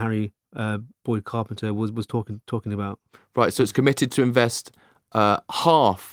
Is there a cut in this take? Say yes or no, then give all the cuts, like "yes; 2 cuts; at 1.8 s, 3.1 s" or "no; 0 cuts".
no; 0 cuts